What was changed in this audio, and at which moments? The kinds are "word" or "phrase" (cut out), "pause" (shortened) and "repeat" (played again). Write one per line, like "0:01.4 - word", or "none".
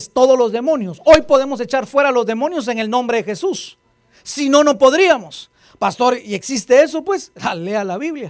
none

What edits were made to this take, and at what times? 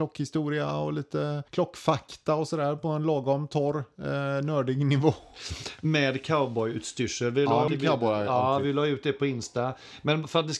0:01.5 - pause
0:07.7 - phrase

